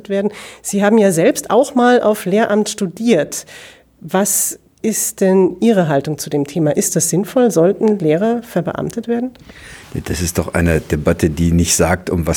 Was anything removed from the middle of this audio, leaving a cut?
no; 0 cuts

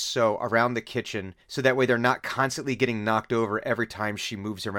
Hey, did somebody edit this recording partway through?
yes; 1 cut; at 1.4 s

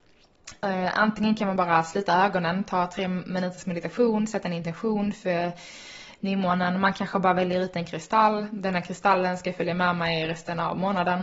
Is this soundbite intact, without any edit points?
yes; 0 cuts

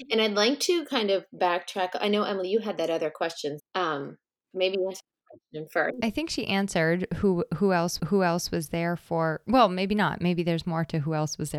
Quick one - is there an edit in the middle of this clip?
yes; 3 cuts; at 3.6 s, 4.5 s, 8.0 s

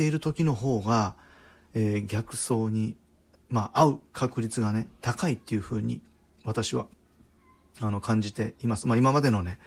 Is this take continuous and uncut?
yes; 0 cuts

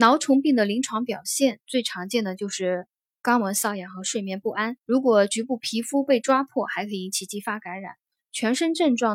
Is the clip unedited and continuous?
no; 1 cut; at 4.8 s

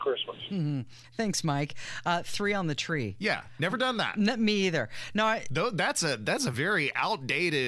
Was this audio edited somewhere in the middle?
no; 0 cuts

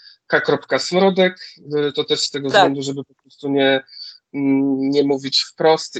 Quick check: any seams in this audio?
no; 0 cuts

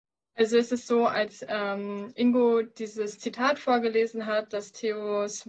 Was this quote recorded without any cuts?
yes; 0 cuts

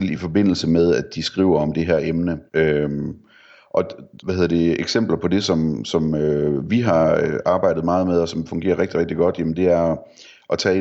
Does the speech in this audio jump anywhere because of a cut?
yes; 2 cuts; at 2.5 s, 4.2 s

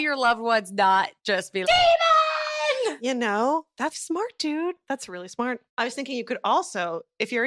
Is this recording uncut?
no; 4 cuts; at 1.2 s, 1.6 s, 3.9 s, 5.7 s

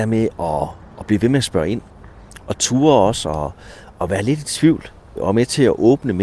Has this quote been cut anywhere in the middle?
no; 0 cuts

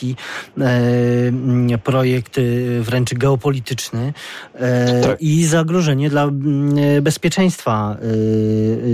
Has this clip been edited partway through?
no; 0 cuts

